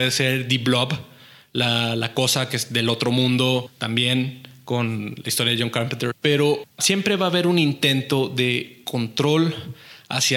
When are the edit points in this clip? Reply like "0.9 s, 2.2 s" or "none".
none